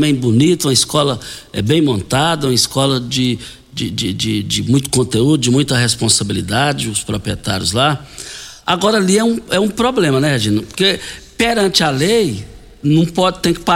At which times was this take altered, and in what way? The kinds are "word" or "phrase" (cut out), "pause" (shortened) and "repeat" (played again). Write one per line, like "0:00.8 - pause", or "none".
none